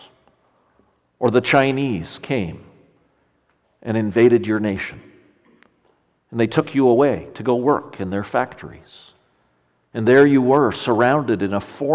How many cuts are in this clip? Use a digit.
0